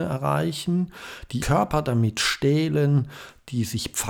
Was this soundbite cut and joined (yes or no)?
yes